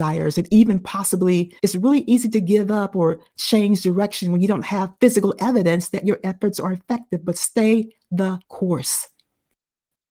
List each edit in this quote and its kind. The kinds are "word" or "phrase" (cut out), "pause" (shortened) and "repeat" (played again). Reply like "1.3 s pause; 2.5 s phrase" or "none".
1.6 s pause; 8.4 s pause